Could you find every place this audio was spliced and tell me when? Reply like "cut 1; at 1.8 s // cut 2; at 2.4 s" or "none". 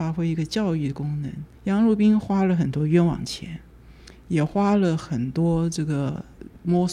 cut 1; at 1.5 s